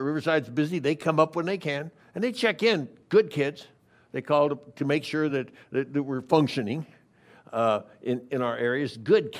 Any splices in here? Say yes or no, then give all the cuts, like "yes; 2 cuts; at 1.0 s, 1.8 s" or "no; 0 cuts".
no; 0 cuts